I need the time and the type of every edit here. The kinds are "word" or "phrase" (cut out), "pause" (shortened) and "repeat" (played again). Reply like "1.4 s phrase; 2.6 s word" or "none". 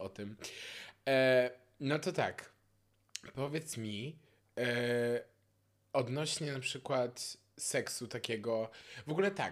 none